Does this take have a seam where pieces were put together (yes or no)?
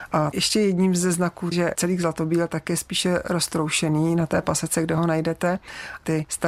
yes